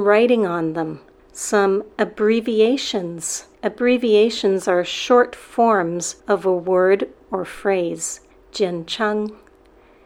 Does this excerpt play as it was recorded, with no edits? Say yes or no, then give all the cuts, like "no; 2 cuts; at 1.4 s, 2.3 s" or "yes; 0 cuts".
no; 4 cuts; at 1.2 s, 3.5 s, 6.2 s, 8.3 s